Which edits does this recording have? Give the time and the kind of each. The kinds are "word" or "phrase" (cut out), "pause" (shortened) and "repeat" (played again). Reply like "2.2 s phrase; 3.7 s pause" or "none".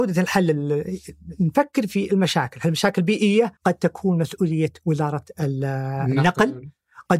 3.6 s pause

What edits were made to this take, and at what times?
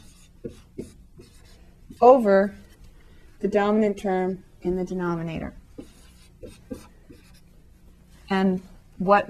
2.0 s pause

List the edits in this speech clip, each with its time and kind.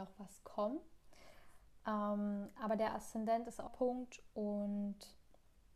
3.7 s phrase

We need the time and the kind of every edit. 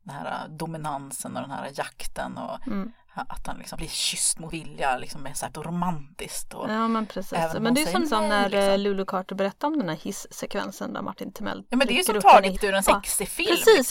3.7 s word; 4.5 s word; 5.5 s word; 8.0 s word; 12.5 s word; 12.9 s word

